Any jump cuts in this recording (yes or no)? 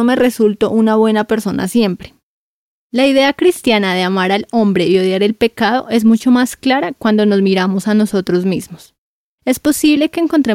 no